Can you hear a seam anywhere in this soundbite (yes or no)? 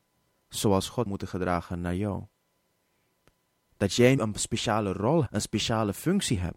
yes